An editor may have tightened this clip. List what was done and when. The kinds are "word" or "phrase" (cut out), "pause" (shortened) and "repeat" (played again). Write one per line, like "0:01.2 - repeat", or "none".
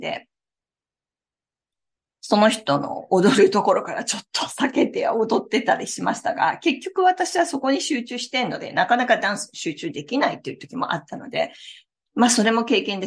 none